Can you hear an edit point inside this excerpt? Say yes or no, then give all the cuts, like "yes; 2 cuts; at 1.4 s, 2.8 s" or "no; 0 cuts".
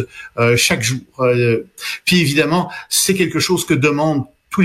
no; 0 cuts